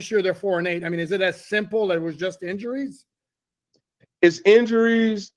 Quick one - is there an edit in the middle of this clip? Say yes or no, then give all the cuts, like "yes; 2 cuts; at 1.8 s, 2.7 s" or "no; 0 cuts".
no; 0 cuts